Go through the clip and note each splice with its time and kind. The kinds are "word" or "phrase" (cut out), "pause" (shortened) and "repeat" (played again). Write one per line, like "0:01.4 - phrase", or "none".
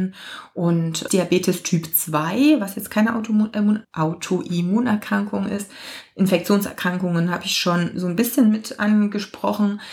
0:01.1 - phrase
0:03.8 - word